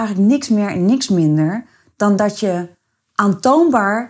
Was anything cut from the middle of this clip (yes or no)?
no